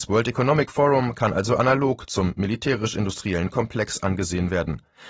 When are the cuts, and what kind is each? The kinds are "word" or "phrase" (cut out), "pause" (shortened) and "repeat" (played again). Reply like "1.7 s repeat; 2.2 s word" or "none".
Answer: none